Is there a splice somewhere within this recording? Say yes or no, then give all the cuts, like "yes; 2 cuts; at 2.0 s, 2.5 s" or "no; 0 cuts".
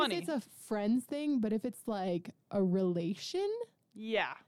no; 0 cuts